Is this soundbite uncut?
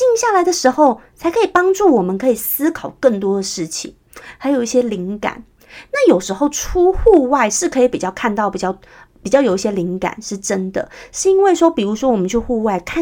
yes; 0 cuts

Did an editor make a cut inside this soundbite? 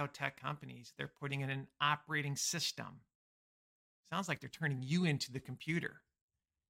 no; 0 cuts

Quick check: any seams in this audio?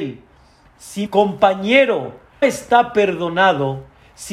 yes; 2 cuts; at 1.1 s, 2.4 s

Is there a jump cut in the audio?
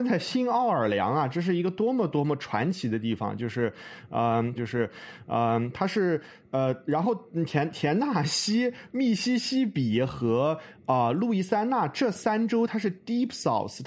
yes; 1 cut; at 4.6 s

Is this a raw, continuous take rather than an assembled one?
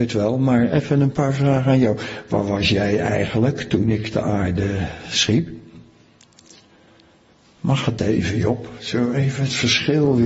yes; 0 cuts

